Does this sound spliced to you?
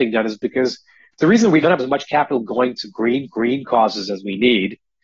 yes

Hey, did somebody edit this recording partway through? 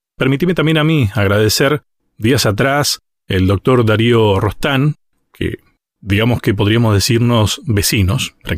no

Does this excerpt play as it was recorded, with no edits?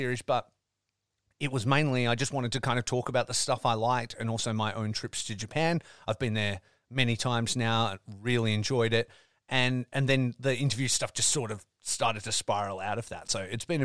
yes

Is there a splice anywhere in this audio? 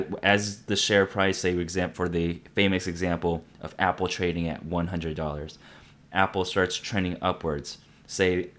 no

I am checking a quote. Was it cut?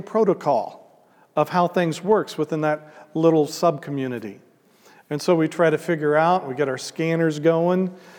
no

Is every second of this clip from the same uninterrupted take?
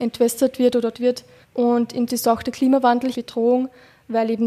no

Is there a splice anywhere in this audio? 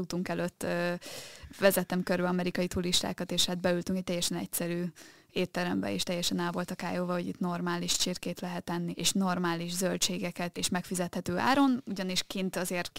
yes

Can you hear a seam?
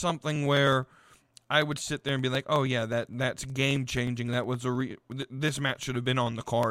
no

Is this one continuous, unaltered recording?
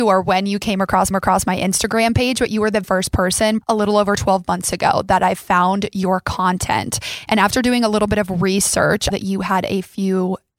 no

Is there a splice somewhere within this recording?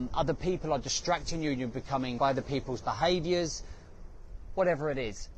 yes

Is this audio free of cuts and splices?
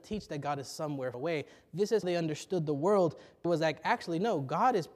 no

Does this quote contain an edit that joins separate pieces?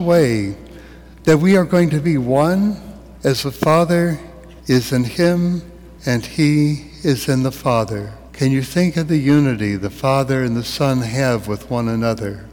yes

